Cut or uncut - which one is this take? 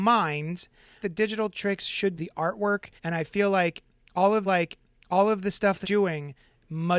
cut